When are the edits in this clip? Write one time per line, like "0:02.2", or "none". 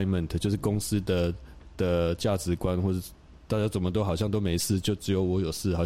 none